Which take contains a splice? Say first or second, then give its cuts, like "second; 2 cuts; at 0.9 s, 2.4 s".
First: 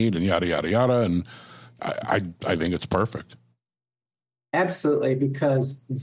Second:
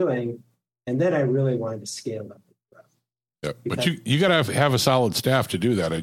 first; 1 cut; at 1.8 s